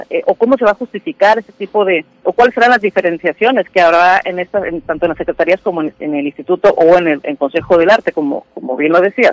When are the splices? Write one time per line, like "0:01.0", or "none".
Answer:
0:02.2